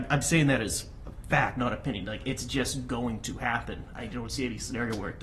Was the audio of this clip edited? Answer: no; 0 cuts

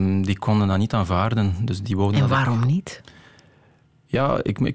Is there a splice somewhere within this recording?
no; 0 cuts

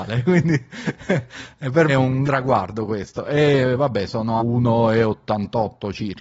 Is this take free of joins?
no; 3 cuts; at 1.9 s, 2.2 s, 4.4 s

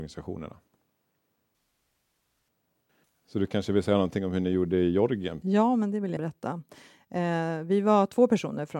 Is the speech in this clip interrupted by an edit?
yes; 1 cut; at 6.2 s

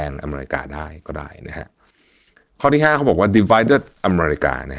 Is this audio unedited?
yes; 0 cuts

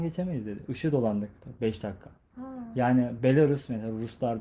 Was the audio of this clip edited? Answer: no; 0 cuts

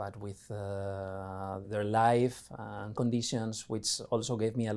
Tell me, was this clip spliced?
yes; 2 cuts; at 1.6 s, 2.9 s

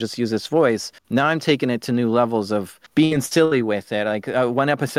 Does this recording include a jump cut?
yes; 2 cuts; at 1.0 s, 2.9 s

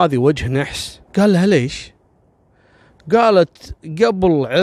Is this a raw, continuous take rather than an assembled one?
no; 1 cut; at 1.1 s

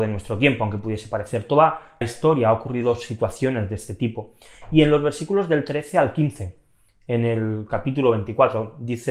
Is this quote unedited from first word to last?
no; 1 cut; at 2.0 s

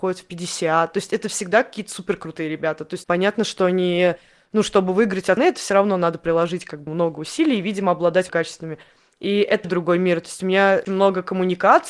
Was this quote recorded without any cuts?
no; 6 cuts; at 3.0 s, 5.4 s, 6.9 s, 8.3 s, 9.6 s, 10.9 s

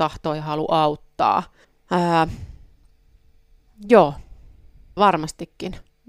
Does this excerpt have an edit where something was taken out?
yes; 2 cuts; at 1.6 s, 5.0 s

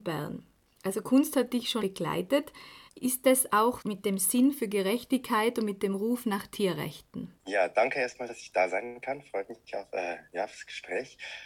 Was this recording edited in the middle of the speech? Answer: yes; 4 cuts; at 1.8 s, 2.9 s, 3.8 s, 7.4 s

